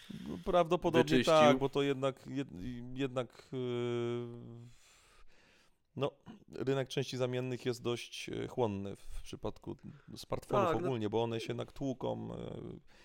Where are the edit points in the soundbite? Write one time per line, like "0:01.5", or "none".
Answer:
none

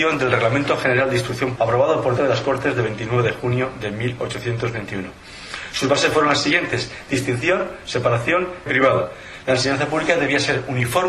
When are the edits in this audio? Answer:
0:01.5
0:02.2
0:08.7

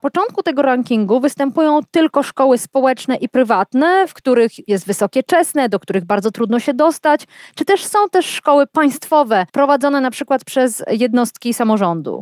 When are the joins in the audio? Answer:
0:09.5

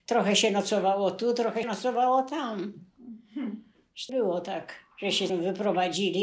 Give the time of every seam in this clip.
0:01.6
0:04.1
0:04.9
0:05.3

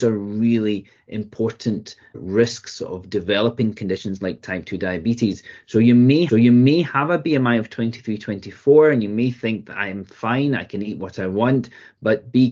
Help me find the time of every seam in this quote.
0:02.1
0:06.3

